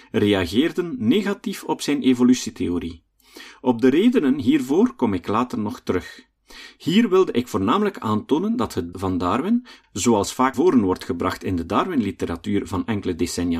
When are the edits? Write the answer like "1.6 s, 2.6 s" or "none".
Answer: 8.9 s, 10.5 s